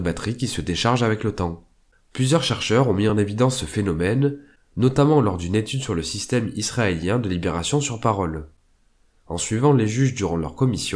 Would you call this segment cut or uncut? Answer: uncut